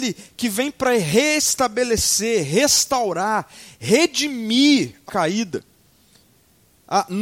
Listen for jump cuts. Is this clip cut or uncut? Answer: cut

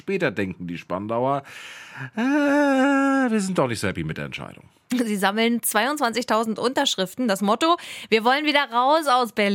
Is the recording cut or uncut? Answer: uncut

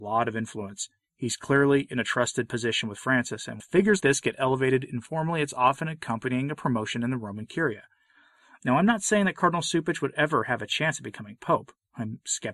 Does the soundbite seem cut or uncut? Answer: cut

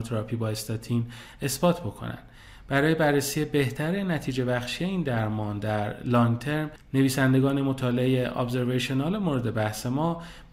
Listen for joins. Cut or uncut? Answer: uncut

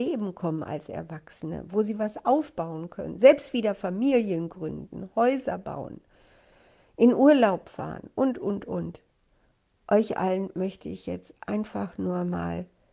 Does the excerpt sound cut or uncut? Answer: uncut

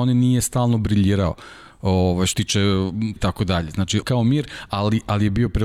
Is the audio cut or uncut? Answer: cut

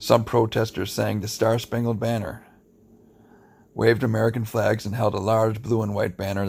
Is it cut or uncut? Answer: uncut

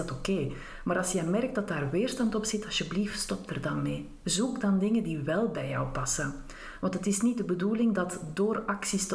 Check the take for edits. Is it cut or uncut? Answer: uncut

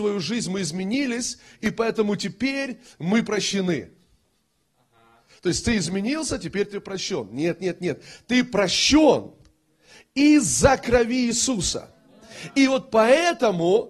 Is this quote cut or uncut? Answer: uncut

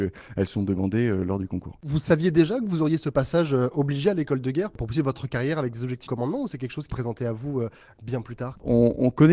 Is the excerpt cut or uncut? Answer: cut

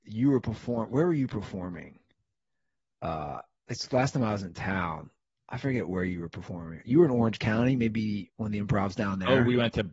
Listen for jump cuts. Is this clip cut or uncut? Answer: cut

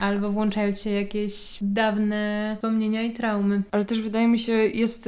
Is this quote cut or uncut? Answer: uncut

